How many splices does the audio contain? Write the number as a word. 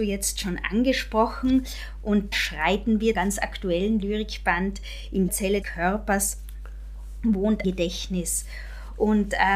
five